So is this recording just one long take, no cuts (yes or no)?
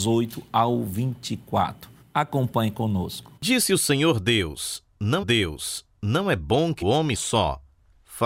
no